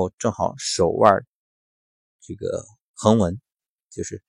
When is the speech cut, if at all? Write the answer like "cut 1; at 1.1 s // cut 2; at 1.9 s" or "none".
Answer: none